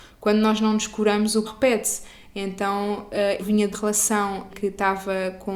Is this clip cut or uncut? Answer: cut